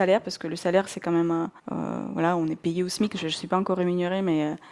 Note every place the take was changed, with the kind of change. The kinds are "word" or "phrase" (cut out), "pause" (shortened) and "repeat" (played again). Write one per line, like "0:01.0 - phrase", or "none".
0:01.6 - pause